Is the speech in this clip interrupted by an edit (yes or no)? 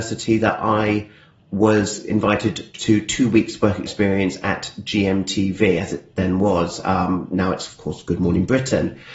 no